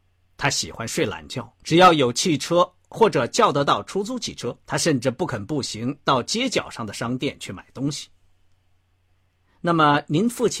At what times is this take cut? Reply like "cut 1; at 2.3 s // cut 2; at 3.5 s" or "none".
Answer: cut 1; at 1.6 s // cut 2; at 4.6 s